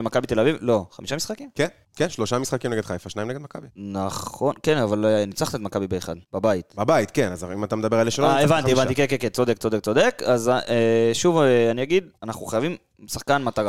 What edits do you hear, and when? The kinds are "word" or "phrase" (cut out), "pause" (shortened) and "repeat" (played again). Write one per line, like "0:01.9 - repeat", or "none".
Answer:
0:01.8 - pause
0:03.7 - pause
0:06.2 - pause
0:12.2 - pause